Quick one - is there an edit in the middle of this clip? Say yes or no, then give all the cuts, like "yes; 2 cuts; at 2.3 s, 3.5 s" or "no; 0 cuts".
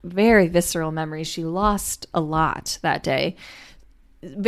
no; 0 cuts